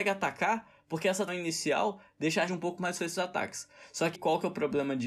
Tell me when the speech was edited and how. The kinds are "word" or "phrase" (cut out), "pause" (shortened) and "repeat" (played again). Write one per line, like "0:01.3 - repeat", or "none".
0:01.3 - word
0:02.5 - word
0:03.0 - word
0:04.1 - word